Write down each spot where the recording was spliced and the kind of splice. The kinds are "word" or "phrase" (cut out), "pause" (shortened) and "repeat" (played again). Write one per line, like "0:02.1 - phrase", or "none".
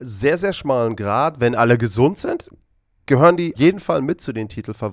0:03.6 - word

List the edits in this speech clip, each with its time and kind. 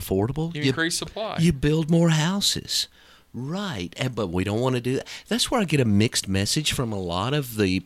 none

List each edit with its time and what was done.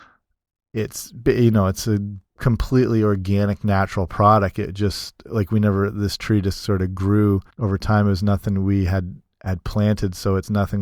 0:02.3 - pause
0:07.5 - pause

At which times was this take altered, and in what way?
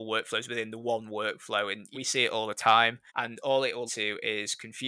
0:01.9 - word
0:03.1 - pause
0:03.9 - word

